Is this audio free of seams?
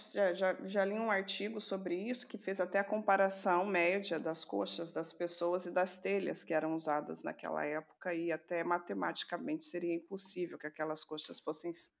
yes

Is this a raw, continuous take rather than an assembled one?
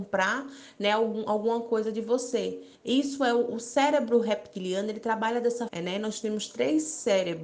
no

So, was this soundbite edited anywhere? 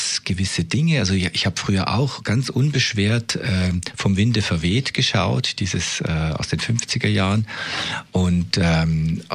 no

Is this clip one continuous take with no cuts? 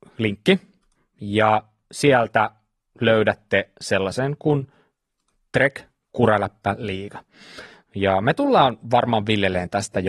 yes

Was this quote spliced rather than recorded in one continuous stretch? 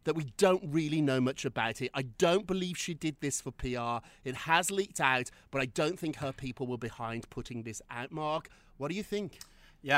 no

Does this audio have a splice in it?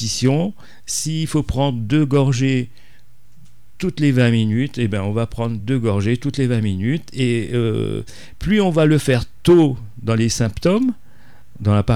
no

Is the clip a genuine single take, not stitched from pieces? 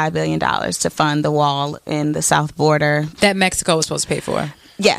no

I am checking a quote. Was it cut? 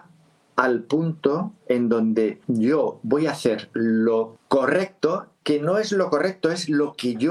yes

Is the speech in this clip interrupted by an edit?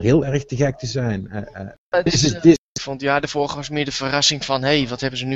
no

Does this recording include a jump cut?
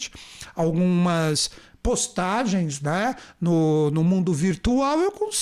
no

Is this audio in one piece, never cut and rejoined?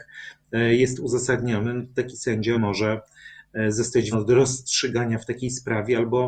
no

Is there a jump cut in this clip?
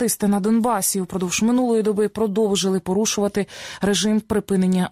no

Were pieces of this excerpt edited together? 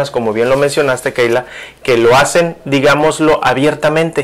no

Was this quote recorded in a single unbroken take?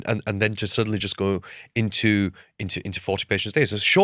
yes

